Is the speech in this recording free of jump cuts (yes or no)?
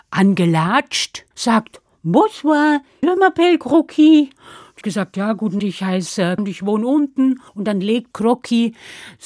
no